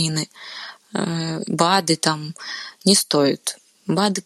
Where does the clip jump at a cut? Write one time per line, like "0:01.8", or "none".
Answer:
none